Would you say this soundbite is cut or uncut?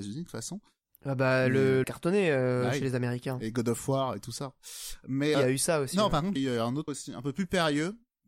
cut